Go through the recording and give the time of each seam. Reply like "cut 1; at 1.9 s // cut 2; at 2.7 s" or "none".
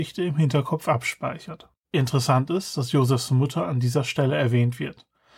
cut 1; at 1.8 s